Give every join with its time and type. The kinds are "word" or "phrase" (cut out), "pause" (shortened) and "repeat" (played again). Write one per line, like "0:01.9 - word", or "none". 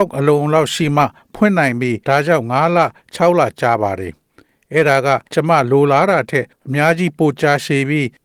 0:02.0 - pause
0:05.3 - pause